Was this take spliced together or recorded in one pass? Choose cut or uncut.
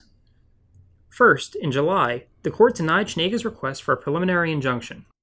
cut